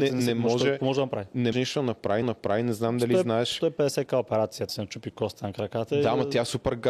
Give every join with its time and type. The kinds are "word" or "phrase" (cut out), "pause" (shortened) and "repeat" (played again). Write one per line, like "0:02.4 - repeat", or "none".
0:01.5 - word
0:02.2 - repeat
0:04.7 - word